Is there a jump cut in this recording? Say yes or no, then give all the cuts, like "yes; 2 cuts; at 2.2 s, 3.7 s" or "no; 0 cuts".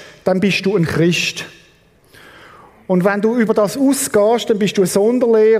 no; 0 cuts